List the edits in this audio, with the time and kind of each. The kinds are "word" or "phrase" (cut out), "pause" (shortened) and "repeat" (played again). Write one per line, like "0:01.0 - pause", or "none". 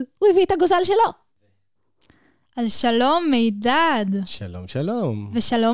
none